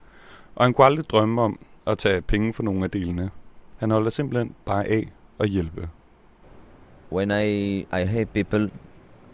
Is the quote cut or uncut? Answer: uncut